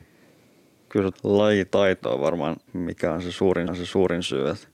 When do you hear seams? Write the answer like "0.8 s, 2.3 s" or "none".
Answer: 1.1 s, 2.7 s, 3.7 s